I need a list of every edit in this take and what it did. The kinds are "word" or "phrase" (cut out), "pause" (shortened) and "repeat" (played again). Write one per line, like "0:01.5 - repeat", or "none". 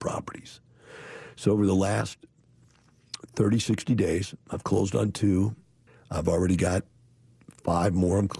0:05.9 - pause